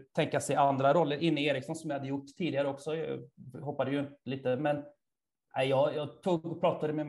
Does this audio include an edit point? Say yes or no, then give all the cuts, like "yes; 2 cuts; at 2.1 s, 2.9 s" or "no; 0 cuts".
no; 0 cuts